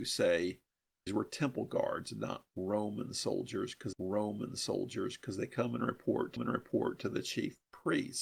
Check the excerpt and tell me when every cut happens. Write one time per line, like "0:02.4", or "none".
0:01.1
0:03.9
0:06.4